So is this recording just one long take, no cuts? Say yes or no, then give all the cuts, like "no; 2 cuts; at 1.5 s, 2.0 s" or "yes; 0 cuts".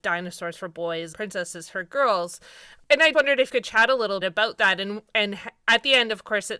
no; 4 cuts; at 1.1 s, 3.1 s, 3.5 s, 4.2 s